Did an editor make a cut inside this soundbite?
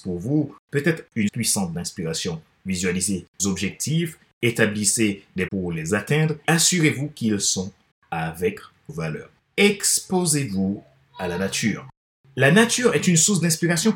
yes; 6 cuts; at 1.3 s, 3.4 s, 5.5 s, 6.4 s, 7.9 s, 8.9 s

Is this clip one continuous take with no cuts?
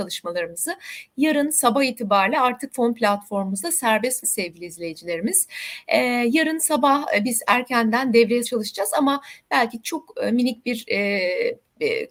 no; 2 cuts; at 4.2 s, 8.4 s

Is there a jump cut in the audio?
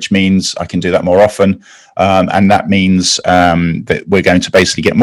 no; 0 cuts

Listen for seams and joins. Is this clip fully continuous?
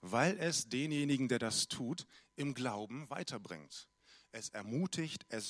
yes; 0 cuts

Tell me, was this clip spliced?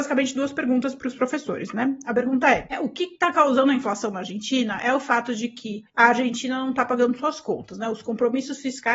no; 0 cuts

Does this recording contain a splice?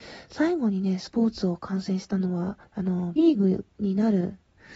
yes; 2 cuts; at 2.6 s, 3.2 s

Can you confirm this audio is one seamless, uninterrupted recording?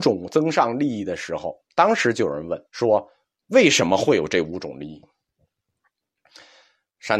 no; 2 cuts; at 1.7 s, 2.7 s

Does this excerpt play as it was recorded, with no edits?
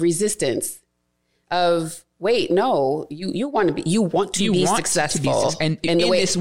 yes; 0 cuts

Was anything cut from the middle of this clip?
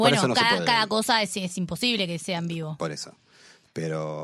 no; 0 cuts

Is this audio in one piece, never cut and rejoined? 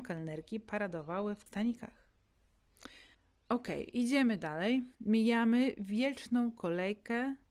no; 3 cuts; at 1.5 s, 3.1 s, 4.9 s

